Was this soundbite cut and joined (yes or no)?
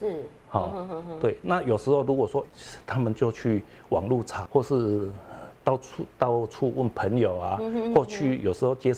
yes